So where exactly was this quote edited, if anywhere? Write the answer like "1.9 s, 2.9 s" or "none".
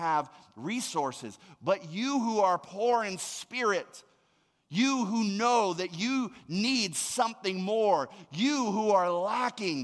none